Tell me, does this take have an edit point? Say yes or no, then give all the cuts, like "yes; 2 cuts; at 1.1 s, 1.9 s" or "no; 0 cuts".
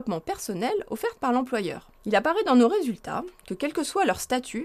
yes; 1 cut; at 1.9 s